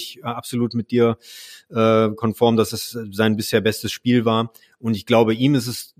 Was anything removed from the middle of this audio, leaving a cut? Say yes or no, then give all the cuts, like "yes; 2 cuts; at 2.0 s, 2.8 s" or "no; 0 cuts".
no; 0 cuts